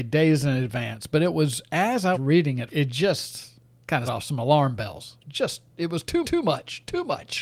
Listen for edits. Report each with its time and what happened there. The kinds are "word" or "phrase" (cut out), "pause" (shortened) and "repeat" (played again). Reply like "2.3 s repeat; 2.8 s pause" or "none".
2.1 s word; 2.7 s phrase; 4.1 s word; 5.2 s pause; 6.2 s repeat

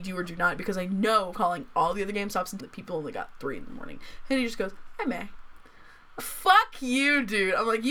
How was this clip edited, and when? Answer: 1.3 s word; 2.6 s word; 6.2 s word

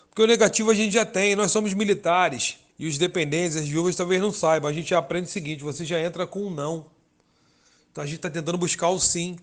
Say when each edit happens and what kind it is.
2.7 s pause

